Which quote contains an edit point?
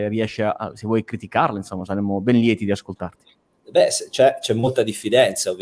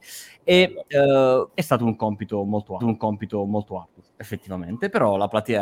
second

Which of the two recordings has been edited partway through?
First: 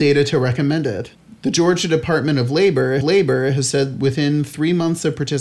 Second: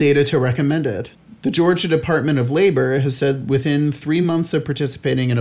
first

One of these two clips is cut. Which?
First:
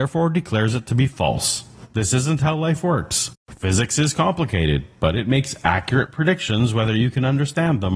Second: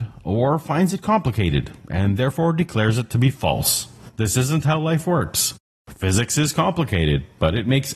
first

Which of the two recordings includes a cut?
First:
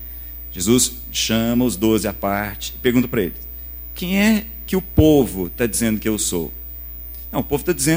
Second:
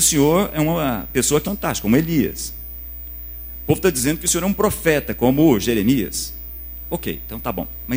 second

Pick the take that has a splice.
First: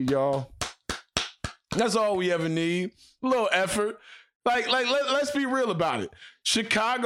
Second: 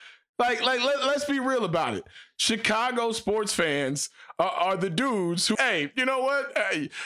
second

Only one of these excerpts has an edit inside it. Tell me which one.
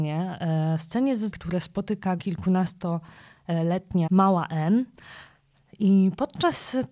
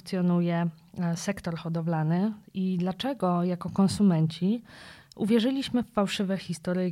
first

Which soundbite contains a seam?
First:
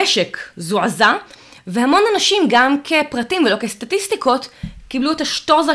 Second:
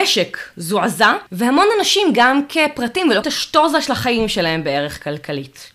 second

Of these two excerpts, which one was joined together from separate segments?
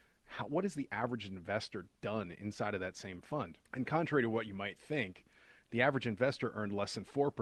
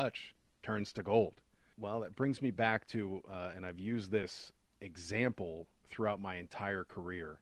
first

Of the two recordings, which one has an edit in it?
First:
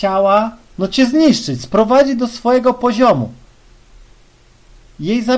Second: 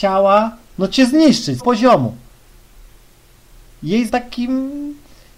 second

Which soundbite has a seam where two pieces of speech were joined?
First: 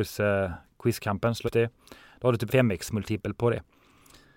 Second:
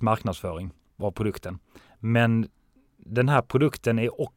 first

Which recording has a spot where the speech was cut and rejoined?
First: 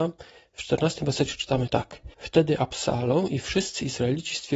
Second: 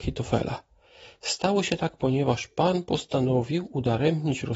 first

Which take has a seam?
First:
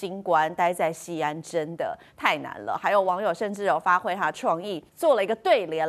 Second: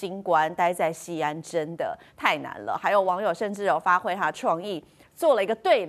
first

